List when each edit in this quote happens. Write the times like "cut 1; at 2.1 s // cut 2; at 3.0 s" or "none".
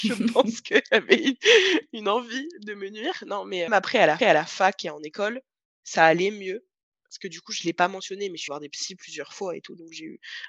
cut 1; at 3.7 s // cut 2; at 4.2 s // cut 3; at 8.5 s